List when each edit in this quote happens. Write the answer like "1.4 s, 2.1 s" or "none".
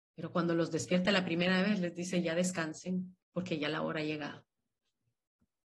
3.2 s